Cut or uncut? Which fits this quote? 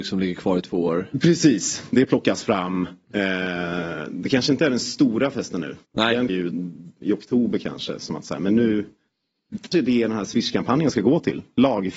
cut